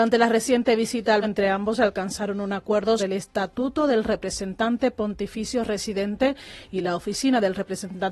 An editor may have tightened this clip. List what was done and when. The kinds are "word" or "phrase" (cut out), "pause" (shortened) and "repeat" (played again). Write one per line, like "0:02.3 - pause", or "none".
0:01.2 - word
0:03.0 - word